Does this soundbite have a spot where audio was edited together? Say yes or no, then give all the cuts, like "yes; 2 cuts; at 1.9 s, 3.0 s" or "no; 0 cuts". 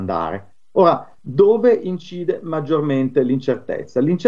yes; 1 cut; at 1.2 s